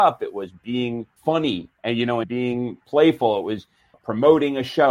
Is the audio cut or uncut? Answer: cut